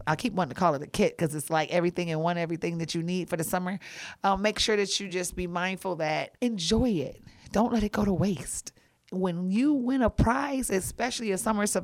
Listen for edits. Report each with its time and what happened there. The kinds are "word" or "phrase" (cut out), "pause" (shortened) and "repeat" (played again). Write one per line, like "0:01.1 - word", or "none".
none